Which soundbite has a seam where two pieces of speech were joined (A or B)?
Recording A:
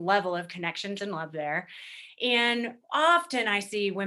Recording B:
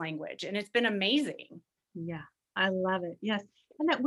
A